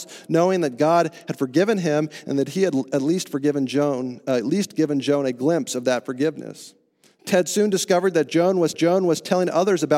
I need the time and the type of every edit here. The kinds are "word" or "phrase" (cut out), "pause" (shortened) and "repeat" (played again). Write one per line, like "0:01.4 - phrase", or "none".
0:08.7 - repeat

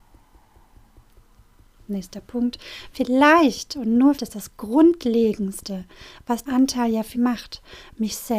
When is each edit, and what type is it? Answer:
0:04.2 - word
0:06.5 - word
0:07.1 - word

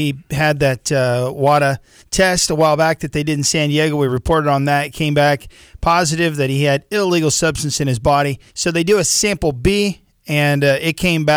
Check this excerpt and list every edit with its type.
0:08.5 - pause

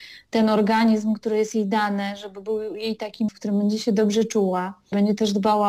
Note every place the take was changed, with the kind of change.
0:03.3 - word

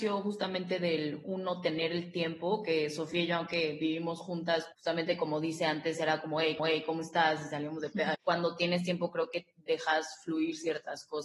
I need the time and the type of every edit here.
0:04.7 - word
0:06.6 - repeat
0:08.1 - phrase

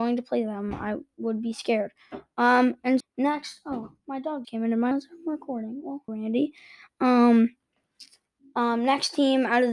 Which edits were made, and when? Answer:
0:03.0 - word
0:04.4 - word
0:04.9 - word
0:06.1 - word

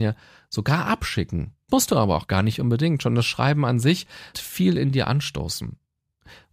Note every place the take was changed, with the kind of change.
0:01.7 - word
0:04.3 - word

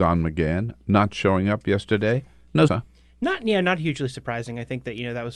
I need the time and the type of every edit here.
0:02.7 - word

